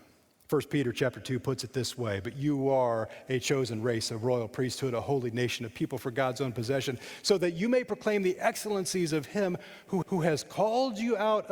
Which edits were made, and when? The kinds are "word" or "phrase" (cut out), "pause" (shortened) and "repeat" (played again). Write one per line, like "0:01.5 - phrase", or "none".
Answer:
0:10.0 - repeat